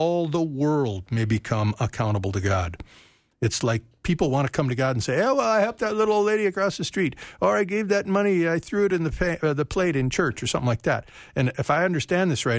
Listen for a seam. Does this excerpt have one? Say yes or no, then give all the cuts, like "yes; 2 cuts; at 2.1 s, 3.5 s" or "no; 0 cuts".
no; 0 cuts